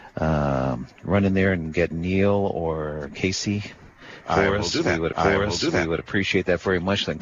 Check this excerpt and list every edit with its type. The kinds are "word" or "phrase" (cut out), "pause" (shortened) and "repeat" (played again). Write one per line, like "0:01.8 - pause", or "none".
0:01.9 - word
0:05.1 - repeat